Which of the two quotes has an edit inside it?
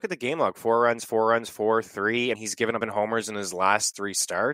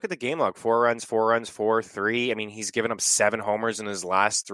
first; 2 cuts; at 2.3 s, 2.8 s

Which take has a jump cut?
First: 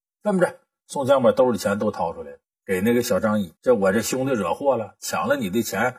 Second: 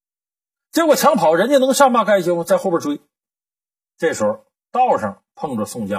first; 2 cuts; at 2.5 s, 3.6 s

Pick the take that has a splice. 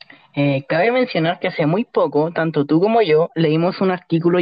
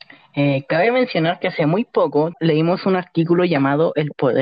second; 1 cut; at 2.3 s

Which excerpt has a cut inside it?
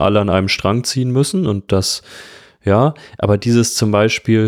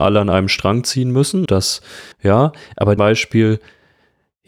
second; 3 cuts; at 1.5 s, 2.1 s, 3.0 s

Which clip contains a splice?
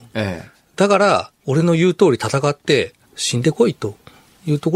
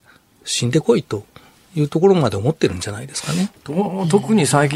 first; 1 cut; at 3.0 s

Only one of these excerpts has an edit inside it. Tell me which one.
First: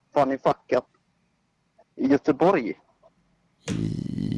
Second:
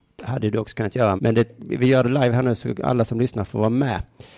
second; 1 cut; at 1.2 s

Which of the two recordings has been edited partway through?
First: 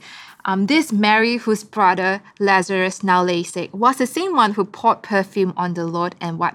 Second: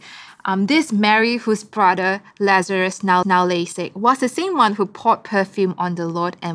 second; 1 cut; at 3.2 s

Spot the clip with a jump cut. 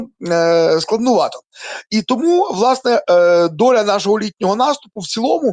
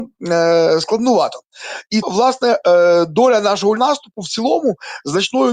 second; 2 cuts; at 2.0 s, 3.8 s

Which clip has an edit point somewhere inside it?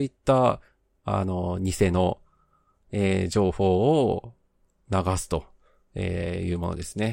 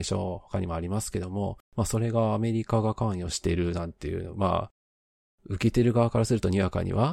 second; 1 cut; at 1.6 s

